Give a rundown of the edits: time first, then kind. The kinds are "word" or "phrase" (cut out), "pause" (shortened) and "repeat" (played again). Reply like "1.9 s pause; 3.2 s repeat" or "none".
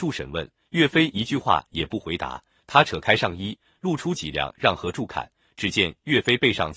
none

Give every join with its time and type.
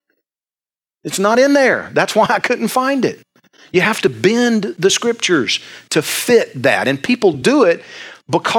none

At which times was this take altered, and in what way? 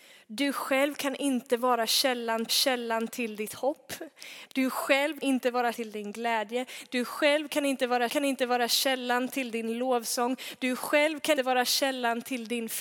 2.5 s repeat; 5.2 s word; 5.7 s word; 8.1 s repeat; 11.4 s word

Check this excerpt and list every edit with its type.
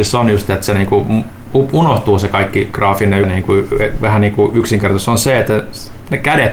3.2 s phrase

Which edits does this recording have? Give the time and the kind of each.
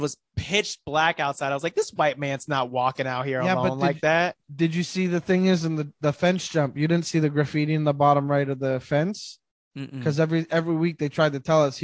4.4 s pause

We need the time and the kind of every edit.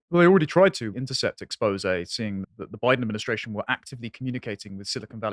0.9 s phrase; 2.4 s word

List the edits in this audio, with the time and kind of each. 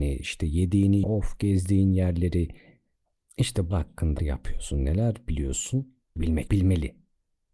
1.0 s word; 3.7 s word; 4.2 s word; 6.2 s word; 6.5 s word

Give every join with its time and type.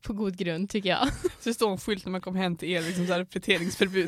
none

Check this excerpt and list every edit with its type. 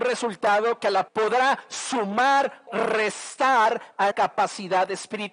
1.1 s word; 2.7 s word; 4.1 s word

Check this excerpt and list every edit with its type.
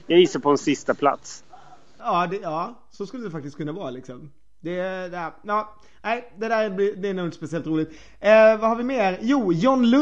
none

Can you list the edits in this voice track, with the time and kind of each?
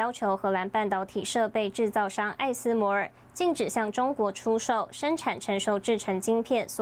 none

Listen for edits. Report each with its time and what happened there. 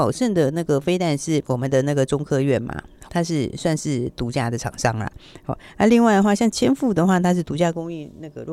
3.1 s word

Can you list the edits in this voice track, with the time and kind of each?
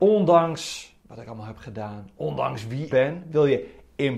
1.0 s pause; 2.9 s word

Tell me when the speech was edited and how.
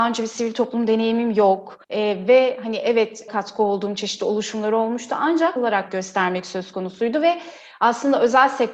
1.8 s pause; 3.3 s phrase; 5.6 s phrase; 5.9 s word

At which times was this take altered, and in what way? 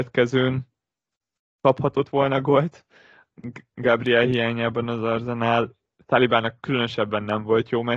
none

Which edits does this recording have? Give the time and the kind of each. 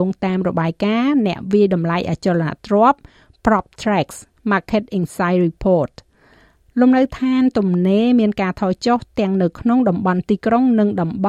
none

